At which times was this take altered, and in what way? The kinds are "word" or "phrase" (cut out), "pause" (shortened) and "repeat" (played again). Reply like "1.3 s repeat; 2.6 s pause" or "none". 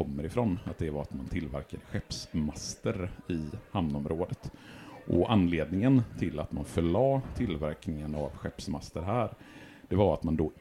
none